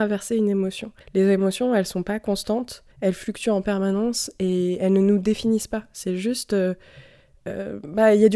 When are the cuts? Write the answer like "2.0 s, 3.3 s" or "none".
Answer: 1.0 s, 2.9 s